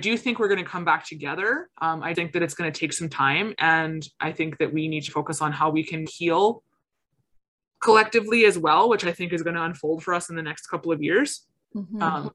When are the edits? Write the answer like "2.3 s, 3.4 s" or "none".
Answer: 1.7 s, 2.1 s, 5.1 s, 6.1 s